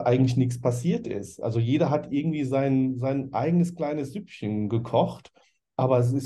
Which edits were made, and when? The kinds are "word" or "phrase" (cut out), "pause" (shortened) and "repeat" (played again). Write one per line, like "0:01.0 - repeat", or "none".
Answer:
none